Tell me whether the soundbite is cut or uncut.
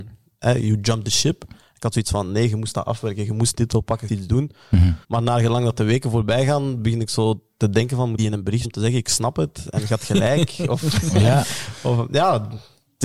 cut